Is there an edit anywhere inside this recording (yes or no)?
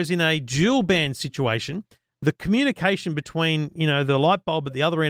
no